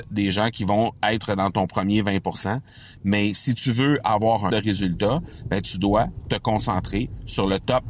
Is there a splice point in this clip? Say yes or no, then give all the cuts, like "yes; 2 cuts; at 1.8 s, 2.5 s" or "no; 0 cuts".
yes; 1 cut; at 4.5 s